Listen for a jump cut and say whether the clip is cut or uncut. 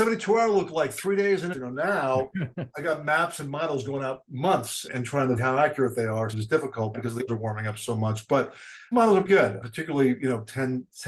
cut